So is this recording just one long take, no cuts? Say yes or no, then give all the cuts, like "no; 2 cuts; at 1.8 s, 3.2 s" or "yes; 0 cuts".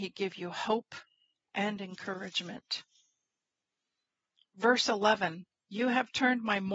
yes; 0 cuts